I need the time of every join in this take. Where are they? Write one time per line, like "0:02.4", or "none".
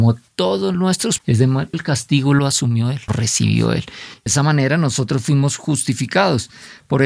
0:01.2
0:01.7
0:03.1
0:04.3